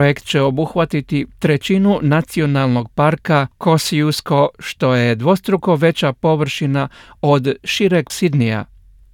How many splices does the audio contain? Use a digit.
1